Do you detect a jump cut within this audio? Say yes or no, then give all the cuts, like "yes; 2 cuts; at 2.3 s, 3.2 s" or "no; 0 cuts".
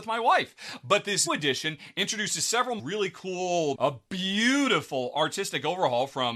yes; 3 cuts; at 1.3 s, 2.8 s, 3.7 s